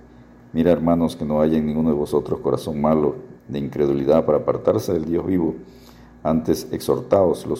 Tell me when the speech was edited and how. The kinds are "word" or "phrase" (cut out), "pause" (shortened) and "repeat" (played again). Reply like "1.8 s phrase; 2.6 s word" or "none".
3.4 s pause